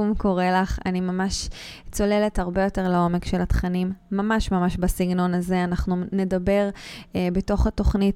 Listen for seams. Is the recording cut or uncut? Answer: uncut